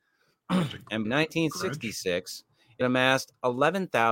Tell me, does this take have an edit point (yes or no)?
yes